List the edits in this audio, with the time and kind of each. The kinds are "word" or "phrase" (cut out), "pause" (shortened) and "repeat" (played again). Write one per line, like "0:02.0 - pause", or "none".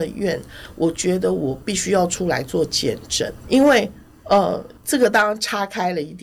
0:03.4 - word
0:04.8 - pause